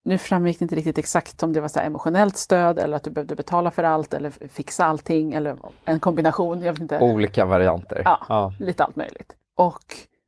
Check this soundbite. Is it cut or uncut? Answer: uncut